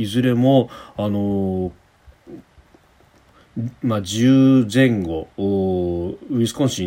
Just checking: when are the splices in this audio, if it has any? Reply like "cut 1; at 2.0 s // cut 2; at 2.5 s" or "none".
cut 1; at 5.3 s